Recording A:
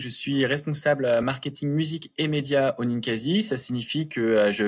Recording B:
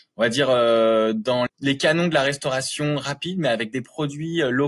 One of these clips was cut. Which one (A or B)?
B